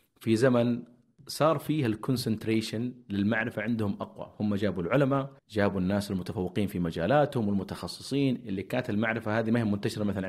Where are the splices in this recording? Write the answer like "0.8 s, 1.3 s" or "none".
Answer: 5.4 s